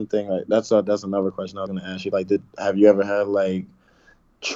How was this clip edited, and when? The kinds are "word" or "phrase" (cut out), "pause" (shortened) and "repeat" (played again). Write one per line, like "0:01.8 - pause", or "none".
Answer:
none